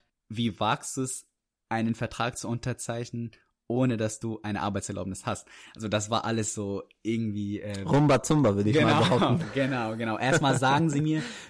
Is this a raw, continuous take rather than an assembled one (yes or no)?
yes